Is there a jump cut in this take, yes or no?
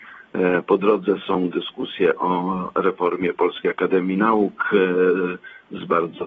no